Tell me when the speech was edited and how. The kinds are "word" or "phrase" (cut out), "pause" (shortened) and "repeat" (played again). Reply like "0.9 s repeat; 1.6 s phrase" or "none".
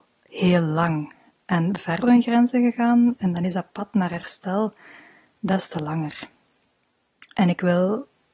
2.0 s word